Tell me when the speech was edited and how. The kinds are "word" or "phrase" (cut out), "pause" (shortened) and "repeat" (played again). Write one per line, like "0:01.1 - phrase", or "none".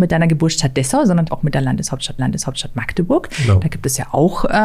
0:01.3 - word
0:02.2 - repeat